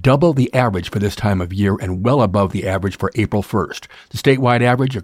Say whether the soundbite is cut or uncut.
uncut